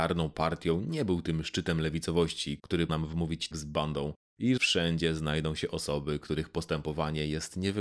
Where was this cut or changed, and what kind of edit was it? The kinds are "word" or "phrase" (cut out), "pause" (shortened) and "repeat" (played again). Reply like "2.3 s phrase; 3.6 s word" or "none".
2.9 s word; 3.5 s word; 4.6 s phrase